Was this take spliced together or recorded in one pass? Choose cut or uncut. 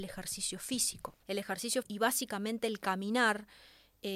cut